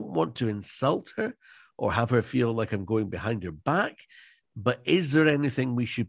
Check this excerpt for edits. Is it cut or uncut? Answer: uncut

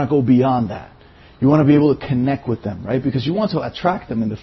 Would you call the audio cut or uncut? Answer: uncut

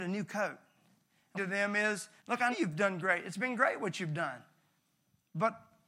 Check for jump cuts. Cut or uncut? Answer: cut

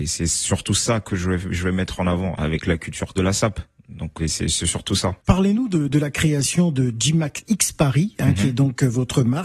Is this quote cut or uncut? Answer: cut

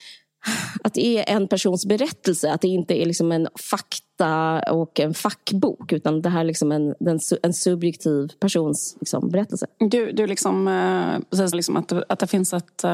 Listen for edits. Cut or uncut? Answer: cut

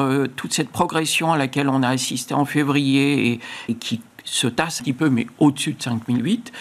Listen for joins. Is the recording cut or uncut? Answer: cut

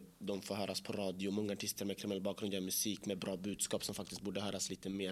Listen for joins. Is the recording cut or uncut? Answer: uncut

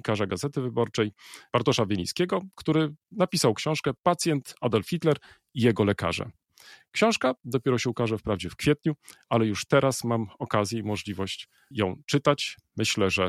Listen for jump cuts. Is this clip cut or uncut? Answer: uncut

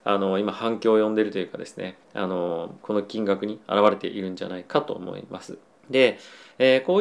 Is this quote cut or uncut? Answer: cut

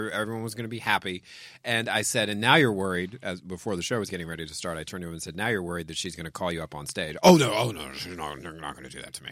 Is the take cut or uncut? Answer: uncut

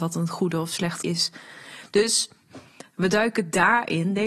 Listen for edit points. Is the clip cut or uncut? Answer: cut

